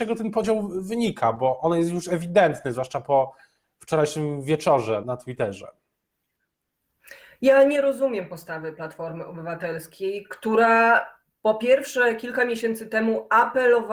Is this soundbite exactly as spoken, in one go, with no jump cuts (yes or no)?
no